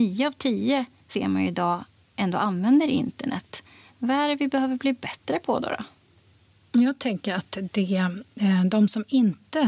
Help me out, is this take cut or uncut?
uncut